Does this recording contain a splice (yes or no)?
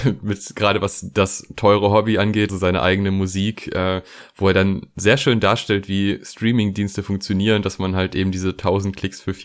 yes